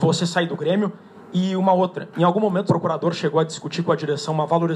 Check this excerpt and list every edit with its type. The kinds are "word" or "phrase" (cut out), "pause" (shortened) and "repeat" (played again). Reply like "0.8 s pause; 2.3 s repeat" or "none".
2.7 s word